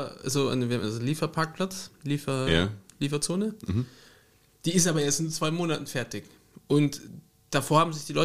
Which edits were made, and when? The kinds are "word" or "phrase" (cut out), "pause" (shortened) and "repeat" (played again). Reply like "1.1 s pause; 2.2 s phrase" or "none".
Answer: none

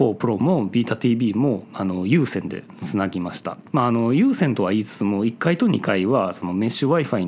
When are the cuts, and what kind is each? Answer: 3.7 s pause

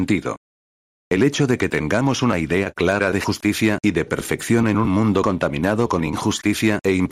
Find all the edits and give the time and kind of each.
none

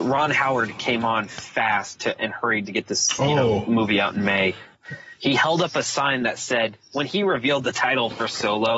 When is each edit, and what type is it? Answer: 5.2 s pause

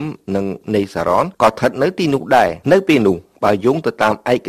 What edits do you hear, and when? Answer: 2.6 s pause

